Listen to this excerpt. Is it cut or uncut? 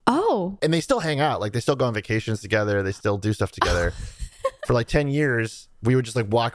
uncut